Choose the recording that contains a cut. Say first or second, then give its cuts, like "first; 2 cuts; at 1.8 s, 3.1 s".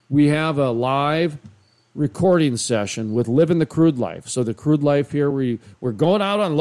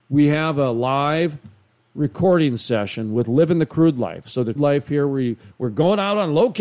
second; 1 cut; at 4.6 s